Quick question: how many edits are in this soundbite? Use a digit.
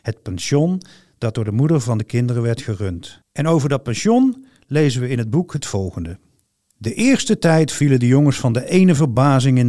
1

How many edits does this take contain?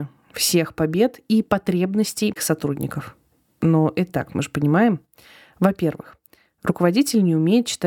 2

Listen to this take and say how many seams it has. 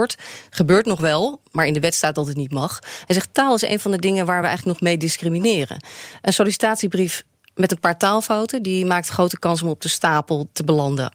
0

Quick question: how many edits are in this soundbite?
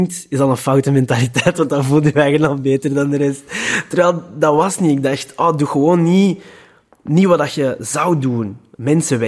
0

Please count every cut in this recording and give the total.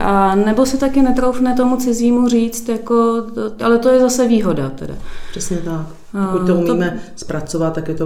1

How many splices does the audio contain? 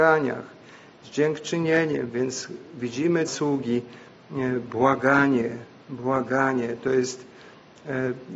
1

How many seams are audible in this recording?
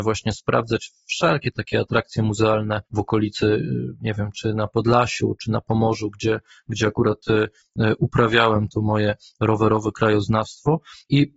1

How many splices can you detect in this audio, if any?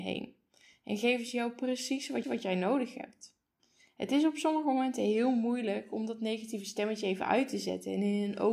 2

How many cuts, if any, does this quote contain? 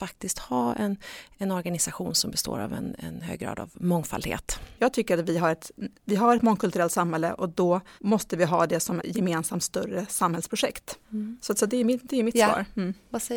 6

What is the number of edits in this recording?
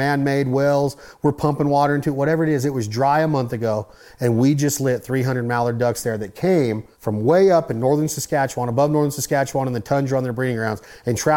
1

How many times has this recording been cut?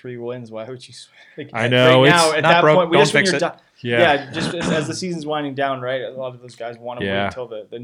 0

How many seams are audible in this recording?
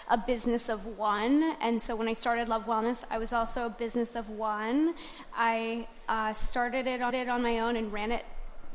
1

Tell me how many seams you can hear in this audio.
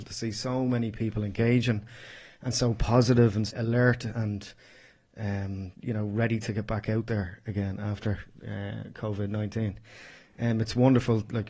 2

